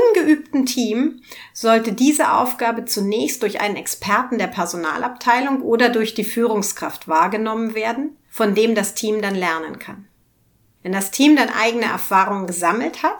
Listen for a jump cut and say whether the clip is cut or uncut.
uncut